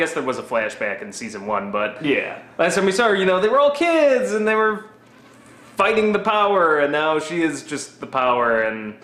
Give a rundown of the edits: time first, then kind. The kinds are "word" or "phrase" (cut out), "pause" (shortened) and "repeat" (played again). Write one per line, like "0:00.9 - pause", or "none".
none